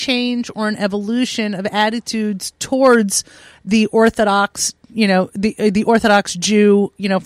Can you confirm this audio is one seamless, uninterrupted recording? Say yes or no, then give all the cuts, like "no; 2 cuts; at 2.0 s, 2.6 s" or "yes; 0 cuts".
yes; 0 cuts